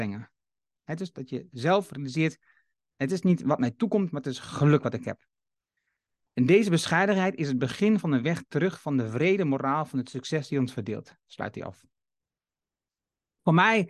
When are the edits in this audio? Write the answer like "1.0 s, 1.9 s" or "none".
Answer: none